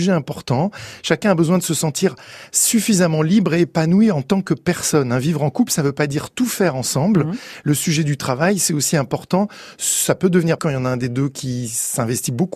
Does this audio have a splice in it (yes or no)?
yes